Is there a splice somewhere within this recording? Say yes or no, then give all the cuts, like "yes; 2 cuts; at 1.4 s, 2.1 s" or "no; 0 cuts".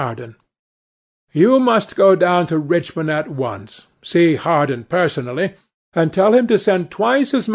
no; 0 cuts